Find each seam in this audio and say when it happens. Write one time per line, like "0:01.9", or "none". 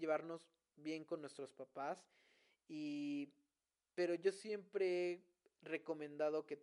none